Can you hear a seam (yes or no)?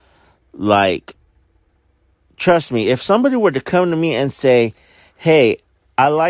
no